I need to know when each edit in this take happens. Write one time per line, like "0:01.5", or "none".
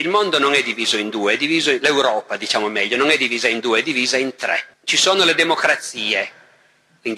0:04.7